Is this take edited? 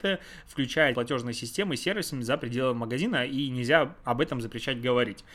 yes; 1 cut; at 0.9 s

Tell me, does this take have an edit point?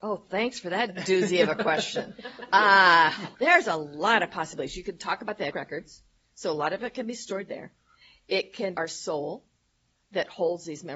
yes; 3 cuts; at 3.3 s, 5.5 s, 8.7 s

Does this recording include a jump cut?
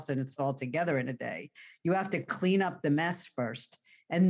no; 0 cuts

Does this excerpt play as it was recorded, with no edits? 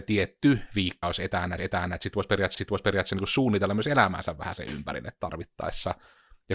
no; 3 cuts; at 1.0 s, 1.6 s, 2.5 s

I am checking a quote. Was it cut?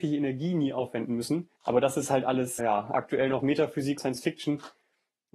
yes; 3 cuts; at 1.6 s, 2.6 s, 4.0 s

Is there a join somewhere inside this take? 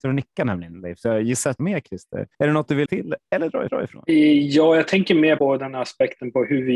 yes; 5 cuts; at 1.6 s, 2.3 s, 2.9 s, 3.7 s, 5.4 s

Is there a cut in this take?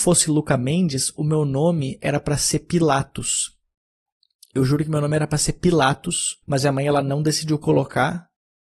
yes; 1 cut; at 6.4 s

